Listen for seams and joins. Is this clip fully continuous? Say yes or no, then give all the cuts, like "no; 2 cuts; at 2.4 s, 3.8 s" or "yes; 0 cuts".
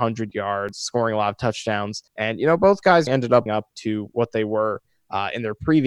no; 3 cuts; at 2.1 s, 3.1 s, 3.5 s